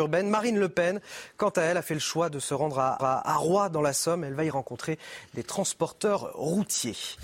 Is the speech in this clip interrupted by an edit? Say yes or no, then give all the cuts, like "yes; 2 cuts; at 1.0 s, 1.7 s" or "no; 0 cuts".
yes; 1 cut; at 3.0 s